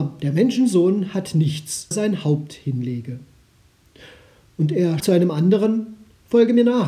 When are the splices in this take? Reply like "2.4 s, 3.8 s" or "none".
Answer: 1.9 s, 5.0 s